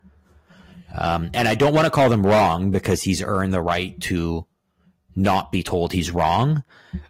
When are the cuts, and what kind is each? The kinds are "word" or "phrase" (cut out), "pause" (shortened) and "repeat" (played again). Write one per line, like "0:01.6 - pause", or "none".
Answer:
none